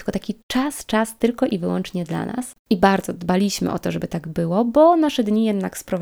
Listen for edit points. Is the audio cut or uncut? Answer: uncut